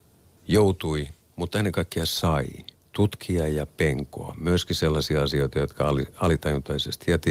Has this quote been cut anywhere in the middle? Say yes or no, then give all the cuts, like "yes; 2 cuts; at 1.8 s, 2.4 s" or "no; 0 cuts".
yes; 1 cut; at 2.7 s